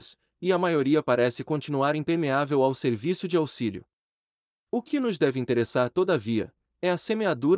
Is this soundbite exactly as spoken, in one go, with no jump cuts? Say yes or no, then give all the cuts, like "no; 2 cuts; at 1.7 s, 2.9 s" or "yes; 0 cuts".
yes; 0 cuts